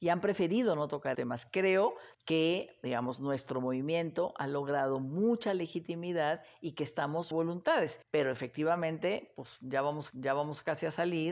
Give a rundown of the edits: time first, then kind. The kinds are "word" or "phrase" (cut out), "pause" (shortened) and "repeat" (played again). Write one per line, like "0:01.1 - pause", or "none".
0:01.1 - word
0:02.1 - pause
0:07.3 - word
0:08.0 - pause
0:10.1 - repeat